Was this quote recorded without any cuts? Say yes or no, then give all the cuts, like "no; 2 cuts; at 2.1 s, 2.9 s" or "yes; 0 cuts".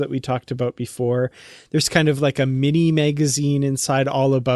yes; 0 cuts